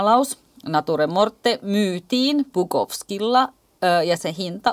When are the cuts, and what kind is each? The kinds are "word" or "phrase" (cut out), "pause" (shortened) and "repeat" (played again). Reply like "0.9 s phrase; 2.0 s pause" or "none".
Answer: none